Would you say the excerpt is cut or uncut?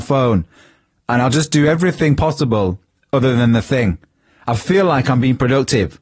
uncut